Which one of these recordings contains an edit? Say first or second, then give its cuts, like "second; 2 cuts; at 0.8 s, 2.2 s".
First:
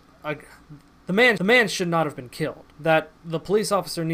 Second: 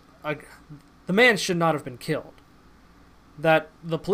first; 2 cuts; at 1.4 s, 2.7 s